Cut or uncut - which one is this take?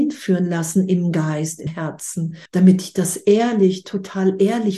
cut